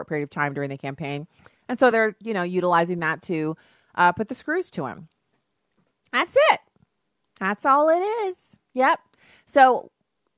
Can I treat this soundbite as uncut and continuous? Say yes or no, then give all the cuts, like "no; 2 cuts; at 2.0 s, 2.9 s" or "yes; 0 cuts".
yes; 0 cuts